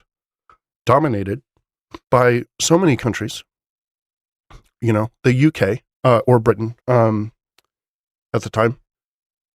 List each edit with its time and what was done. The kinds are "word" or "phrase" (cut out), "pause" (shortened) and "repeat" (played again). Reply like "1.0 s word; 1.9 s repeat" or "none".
2.0 s pause; 5.9 s pause; 6.8 s pause